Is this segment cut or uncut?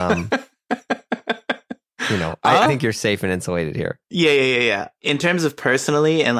cut